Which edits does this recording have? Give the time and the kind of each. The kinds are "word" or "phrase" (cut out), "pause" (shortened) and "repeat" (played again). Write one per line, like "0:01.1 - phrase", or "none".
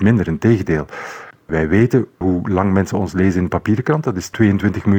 none